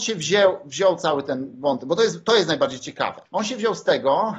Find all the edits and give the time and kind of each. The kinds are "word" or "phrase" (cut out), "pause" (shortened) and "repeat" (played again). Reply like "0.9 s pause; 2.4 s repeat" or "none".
3.3 s pause